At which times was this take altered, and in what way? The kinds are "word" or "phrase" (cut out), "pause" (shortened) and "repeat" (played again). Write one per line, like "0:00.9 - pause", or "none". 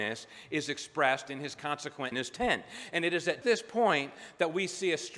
0:02.1 - phrase
0:03.4 - word